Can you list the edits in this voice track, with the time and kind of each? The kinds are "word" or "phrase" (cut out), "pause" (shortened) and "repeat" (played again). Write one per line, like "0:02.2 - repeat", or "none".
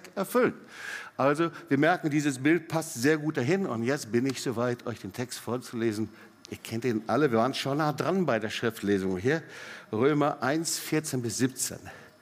none